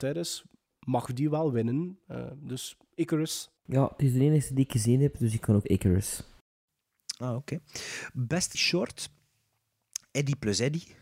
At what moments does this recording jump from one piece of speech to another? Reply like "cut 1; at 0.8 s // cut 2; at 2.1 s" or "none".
cut 1; at 3.6 s // cut 2; at 5.6 s // cut 3; at 8.5 s

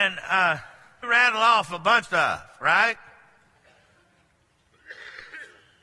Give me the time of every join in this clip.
cut 1; at 1.0 s // cut 2; at 2.0 s

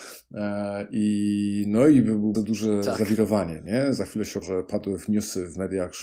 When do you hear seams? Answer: cut 1; at 2.3 s // cut 2; at 4.4 s

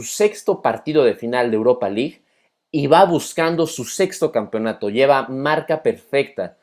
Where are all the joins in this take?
none

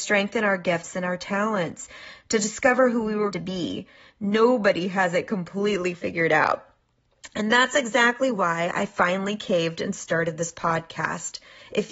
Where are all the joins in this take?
cut 1; at 3.3 s

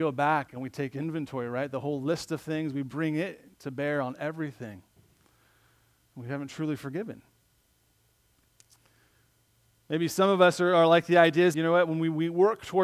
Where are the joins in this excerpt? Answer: cut 1; at 3.5 s // cut 2; at 11.5 s

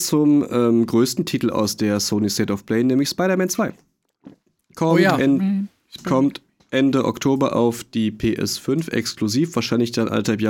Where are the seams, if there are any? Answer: none

